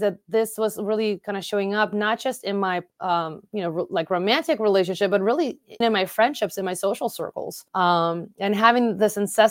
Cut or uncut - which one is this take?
cut